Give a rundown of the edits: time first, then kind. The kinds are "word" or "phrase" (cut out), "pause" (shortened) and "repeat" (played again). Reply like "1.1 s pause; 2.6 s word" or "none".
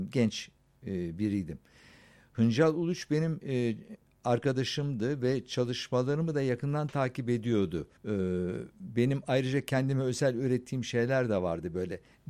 8.0 s pause